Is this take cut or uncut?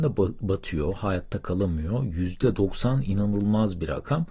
uncut